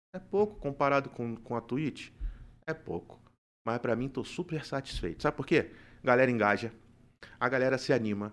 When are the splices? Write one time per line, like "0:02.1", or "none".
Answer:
none